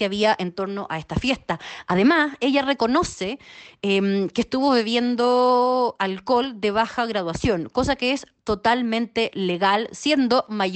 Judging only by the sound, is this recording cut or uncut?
uncut